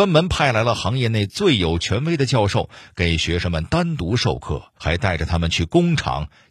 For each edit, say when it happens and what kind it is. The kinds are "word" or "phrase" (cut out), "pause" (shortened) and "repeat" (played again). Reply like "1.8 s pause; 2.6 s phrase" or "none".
4.8 s pause